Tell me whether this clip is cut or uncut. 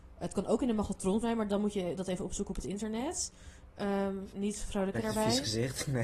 cut